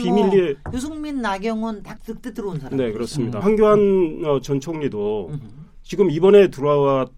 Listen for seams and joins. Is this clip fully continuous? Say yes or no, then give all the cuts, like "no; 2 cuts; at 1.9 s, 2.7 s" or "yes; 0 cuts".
no; 2 cuts; at 2.0 s, 3.4 s